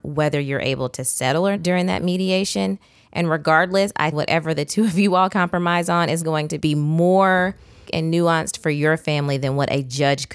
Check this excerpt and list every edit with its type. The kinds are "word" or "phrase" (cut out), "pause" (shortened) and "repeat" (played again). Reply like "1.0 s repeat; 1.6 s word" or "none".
1.6 s word; 4.1 s word; 5.3 s word; 6.2 s word; 6.6 s word; 7.9 s word